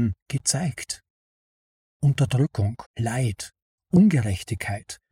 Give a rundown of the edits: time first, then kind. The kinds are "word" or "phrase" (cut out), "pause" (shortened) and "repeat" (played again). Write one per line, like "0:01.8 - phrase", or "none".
0:02.9 - pause